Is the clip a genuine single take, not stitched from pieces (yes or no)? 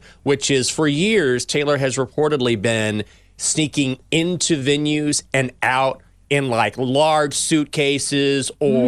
yes